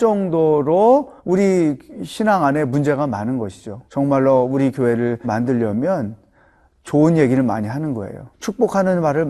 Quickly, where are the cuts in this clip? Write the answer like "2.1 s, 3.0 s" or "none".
1.2 s, 3.9 s, 5.2 s, 8.3 s

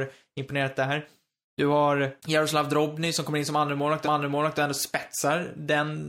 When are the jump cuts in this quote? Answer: 2.2 s, 4.0 s

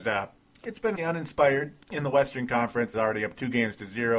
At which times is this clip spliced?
1.0 s, 1.8 s, 2.9 s

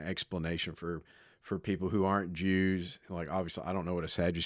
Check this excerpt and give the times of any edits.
none

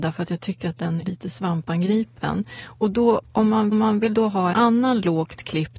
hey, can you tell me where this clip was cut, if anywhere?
1.0 s, 3.7 s, 4.5 s

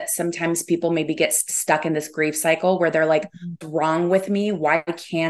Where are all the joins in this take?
3.6 s

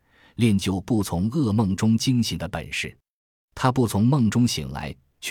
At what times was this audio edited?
none

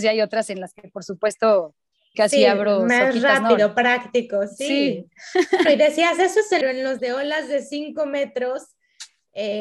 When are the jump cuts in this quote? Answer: 2.1 s, 5.6 s, 6.6 s, 7.0 s

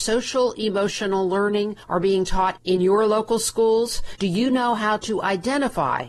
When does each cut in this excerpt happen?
none

